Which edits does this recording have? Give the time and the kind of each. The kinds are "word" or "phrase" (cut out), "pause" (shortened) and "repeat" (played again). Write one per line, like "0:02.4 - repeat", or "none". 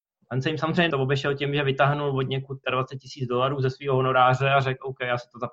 0:00.9 - phrase
0:02.6 - word